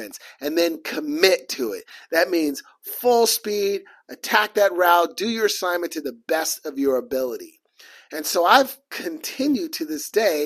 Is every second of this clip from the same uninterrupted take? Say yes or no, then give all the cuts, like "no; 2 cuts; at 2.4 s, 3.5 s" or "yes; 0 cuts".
yes; 0 cuts